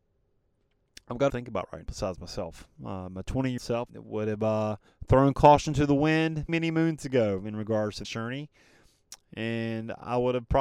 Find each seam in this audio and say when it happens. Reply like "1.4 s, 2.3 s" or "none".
1.3 s, 1.8 s, 3.6 s, 3.9 s, 4.9 s, 6.5 s, 8.0 s